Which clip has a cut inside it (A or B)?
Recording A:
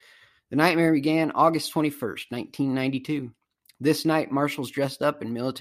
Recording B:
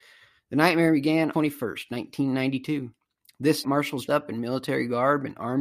B